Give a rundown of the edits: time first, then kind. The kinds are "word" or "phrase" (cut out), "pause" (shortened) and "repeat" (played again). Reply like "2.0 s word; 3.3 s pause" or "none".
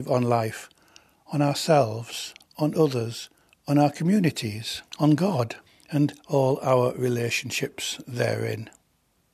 3.5 s pause; 4.9 s pause; 5.7 s pause